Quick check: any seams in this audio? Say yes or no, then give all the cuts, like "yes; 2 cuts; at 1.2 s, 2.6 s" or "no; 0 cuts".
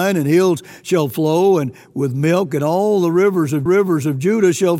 yes; 1 cut; at 3.7 s